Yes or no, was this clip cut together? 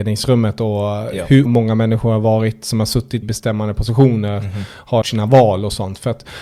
yes